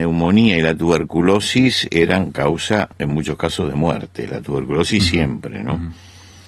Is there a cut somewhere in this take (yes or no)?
yes